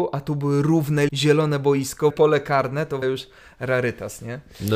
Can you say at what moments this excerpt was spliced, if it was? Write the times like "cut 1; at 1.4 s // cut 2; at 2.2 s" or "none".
cut 1; at 1.1 s // cut 2; at 2.1 s // cut 3; at 3.0 s